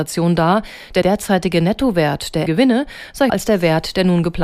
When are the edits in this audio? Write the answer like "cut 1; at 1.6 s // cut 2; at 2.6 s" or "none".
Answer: cut 1; at 1.0 s // cut 2; at 2.5 s // cut 3; at 3.3 s